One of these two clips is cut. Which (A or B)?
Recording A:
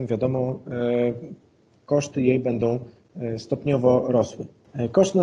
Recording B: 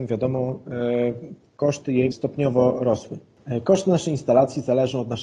B